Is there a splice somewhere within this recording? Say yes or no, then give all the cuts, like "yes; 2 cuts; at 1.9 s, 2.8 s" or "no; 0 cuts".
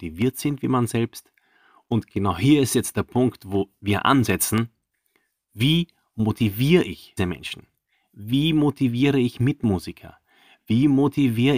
yes; 1 cut; at 7.2 s